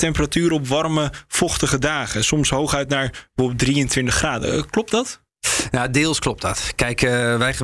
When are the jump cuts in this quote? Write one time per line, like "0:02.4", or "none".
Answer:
0:05.3